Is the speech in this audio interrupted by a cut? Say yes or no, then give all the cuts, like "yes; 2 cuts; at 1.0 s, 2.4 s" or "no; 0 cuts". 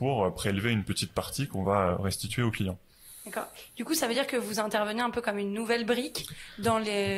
no; 0 cuts